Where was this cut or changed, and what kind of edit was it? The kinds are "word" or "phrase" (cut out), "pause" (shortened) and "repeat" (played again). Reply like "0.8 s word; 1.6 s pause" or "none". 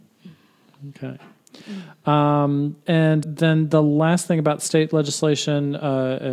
3.2 s word